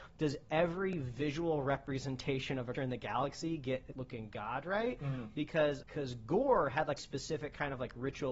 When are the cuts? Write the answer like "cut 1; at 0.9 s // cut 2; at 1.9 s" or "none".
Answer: cut 1; at 2.7 s // cut 2; at 3.9 s // cut 3; at 5.8 s // cut 4; at 7.0 s